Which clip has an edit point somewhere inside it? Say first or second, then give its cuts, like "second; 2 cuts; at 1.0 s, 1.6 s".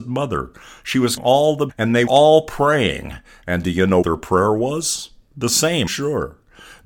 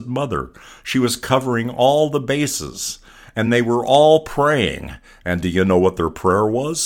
first; 5 cuts; at 1.2 s, 1.7 s, 2.1 s, 4.0 s, 5.9 s